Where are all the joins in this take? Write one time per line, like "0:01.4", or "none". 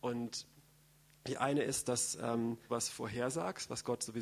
0:02.7